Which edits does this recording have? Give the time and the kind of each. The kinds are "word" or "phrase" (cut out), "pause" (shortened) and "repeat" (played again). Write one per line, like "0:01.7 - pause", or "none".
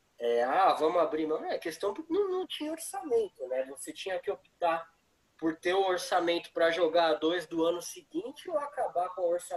none